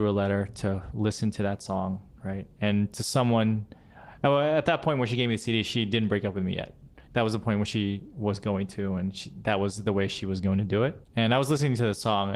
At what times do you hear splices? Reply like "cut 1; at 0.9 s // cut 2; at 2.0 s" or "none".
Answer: cut 1; at 2.2 s // cut 2; at 7.1 s // cut 3; at 11.0 s